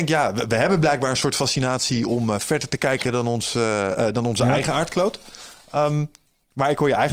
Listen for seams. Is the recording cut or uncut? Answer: uncut